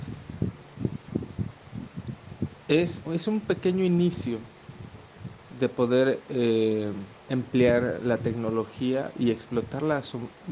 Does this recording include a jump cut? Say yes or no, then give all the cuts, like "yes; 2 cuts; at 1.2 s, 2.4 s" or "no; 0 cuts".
yes; 2 cuts; at 3.0 s, 7.2 s